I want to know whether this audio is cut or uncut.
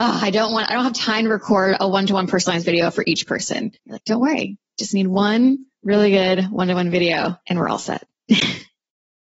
cut